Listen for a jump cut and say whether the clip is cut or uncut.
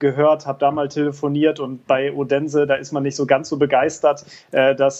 uncut